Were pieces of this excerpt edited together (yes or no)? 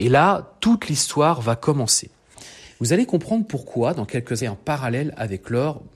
yes